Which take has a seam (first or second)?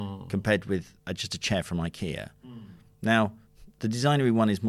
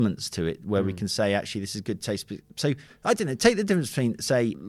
first